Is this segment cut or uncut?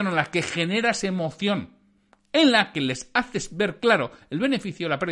uncut